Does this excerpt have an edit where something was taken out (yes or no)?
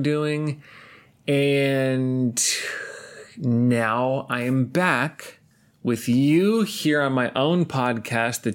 yes